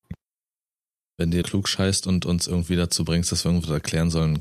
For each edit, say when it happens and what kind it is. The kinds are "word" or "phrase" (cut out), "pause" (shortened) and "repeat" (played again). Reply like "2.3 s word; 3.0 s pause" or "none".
1.4 s word